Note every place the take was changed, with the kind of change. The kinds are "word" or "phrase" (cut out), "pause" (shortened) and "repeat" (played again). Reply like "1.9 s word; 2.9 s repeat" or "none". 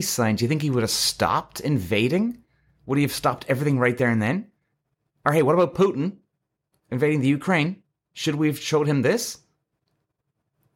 none